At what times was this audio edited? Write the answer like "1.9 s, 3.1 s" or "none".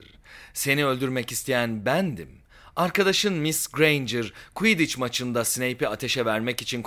none